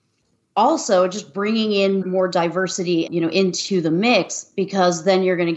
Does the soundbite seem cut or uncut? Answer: cut